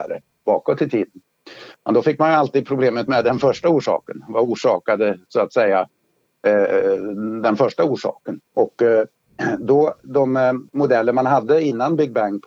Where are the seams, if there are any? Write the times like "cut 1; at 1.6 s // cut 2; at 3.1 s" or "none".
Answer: cut 1; at 8.5 s // cut 2; at 10.7 s